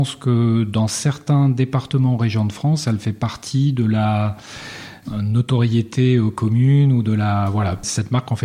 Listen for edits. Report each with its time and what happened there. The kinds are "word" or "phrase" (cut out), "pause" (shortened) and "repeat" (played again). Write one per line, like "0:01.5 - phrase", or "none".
none